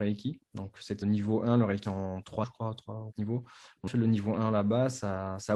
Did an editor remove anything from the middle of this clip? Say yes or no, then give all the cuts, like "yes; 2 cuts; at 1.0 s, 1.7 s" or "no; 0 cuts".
yes; 5 cuts; at 1.0 s, 1.8 s, 2.4 s, 3.1 s, 3.9 s